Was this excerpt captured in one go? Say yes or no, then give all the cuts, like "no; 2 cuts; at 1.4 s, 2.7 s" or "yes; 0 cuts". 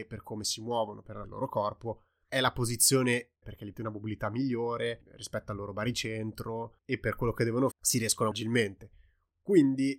no; 6 cuts; at 1.2 s, 3.4 s, 3.7 s, 6.8 s, 7.7 s, 8.3 s